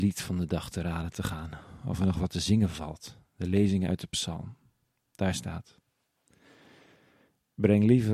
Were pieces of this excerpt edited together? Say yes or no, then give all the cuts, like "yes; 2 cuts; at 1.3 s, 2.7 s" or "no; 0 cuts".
no; 0 cuts